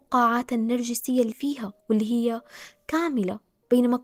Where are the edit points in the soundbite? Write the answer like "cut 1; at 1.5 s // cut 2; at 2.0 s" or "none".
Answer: cut 1; at 1.3 s // cut 2; at 1.8 s

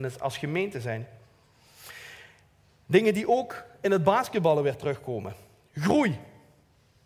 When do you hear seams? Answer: none

